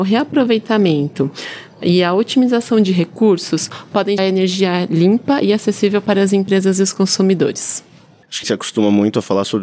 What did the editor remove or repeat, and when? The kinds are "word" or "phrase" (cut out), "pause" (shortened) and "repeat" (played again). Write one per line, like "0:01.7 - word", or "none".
0:04.2 - word
0:08.4 - word

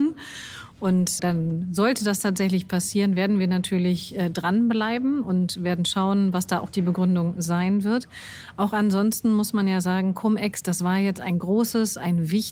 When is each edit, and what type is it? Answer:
0:01.2 - word

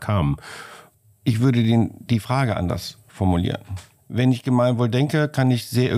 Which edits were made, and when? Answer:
0:04.0 - pause

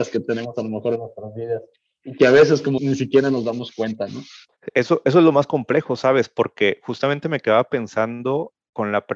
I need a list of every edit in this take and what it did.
0:02.8 - word

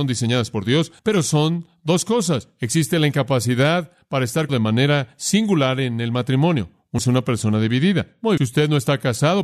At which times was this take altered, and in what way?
0:01.0 - pause
0:04.5 - word
0:07.0 - phrase
0:08.4 - phrase

